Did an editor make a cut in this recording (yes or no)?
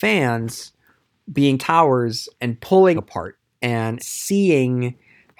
yes